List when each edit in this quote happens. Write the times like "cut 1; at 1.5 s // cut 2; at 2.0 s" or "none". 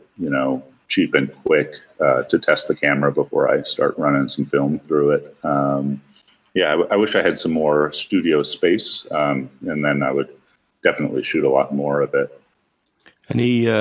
none